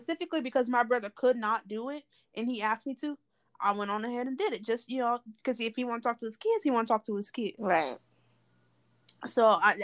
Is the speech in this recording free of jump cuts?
yes; 0 cuts

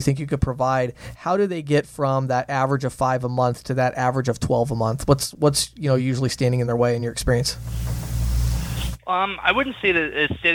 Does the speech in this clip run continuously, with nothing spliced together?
yes; 0 cuts

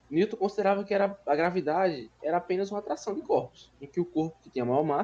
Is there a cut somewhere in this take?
no; 0 cuts

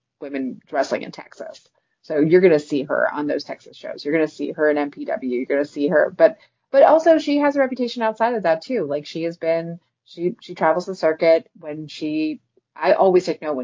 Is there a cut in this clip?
no; 0 cuts

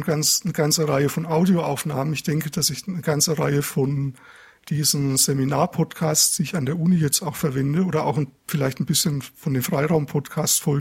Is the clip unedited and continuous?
yes; 0 cuts

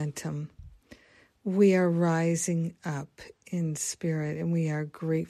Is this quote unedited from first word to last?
yes; 0 cuts

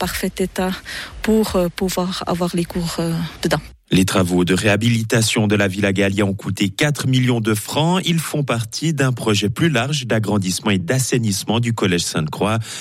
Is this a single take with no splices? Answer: yes; 0 cuts

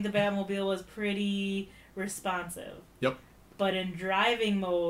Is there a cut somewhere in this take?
no; 0 cuts

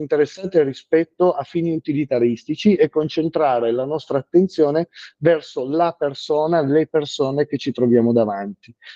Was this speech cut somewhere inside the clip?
no; 0 cuts

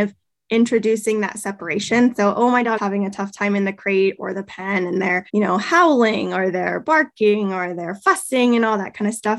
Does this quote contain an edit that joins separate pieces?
yes; 2 cuts; at 2.8 s, 5.3 s

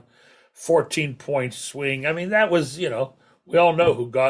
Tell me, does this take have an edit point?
no; 0 cuts

